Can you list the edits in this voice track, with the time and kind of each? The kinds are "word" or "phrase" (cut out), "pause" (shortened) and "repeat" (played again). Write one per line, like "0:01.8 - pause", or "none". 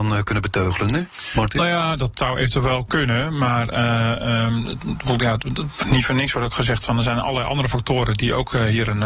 none